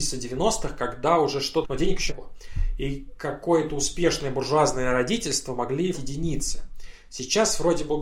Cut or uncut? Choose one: cut